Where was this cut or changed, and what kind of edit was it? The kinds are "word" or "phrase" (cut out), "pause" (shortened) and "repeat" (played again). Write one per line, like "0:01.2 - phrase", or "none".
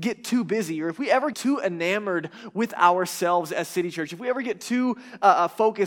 0:01.3 - word